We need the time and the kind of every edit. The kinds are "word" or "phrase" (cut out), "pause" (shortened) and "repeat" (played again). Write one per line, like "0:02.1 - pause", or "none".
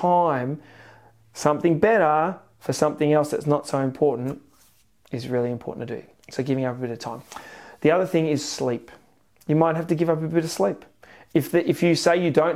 none